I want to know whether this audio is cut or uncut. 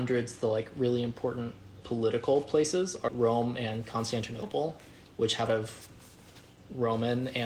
cut